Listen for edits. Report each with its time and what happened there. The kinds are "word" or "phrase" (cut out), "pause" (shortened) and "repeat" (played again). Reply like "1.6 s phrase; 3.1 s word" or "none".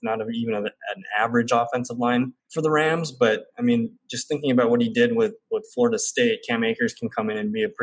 2.4 s pause